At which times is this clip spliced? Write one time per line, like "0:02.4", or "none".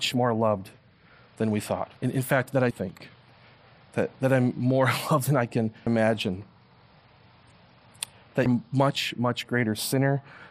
0:02.0
0:02.7
0:05.9
0:08.5